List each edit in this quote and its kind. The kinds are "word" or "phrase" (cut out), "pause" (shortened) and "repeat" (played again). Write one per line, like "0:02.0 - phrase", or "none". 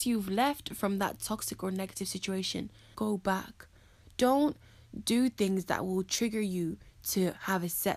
0:02.9 - word